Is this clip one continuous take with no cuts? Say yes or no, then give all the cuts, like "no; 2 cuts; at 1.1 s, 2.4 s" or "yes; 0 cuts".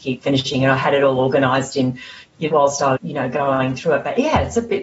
no; 2 cuts; at 2.5 s, 3.0 s